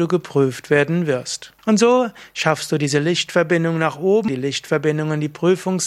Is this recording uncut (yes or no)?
no